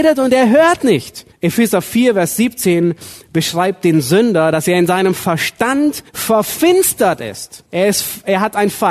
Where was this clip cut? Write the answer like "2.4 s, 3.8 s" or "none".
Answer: 1.3 s, 6.1 s, 7.7 s